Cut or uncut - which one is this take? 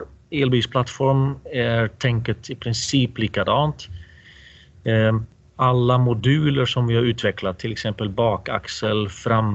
uncut